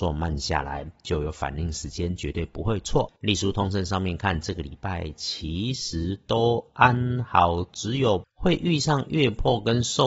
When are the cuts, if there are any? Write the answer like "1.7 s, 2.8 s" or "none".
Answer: 3.2 s